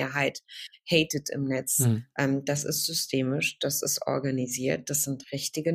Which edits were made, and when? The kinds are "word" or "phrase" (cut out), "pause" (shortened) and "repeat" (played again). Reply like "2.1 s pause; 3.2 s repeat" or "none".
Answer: none